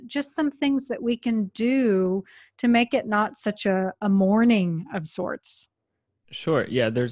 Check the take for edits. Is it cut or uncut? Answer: uncut